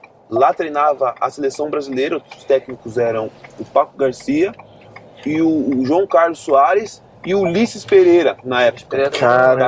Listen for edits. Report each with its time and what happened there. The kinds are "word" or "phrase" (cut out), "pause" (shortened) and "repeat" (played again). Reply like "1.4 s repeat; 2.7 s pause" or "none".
none